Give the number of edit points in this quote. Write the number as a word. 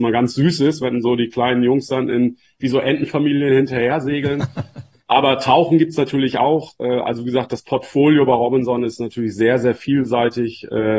zero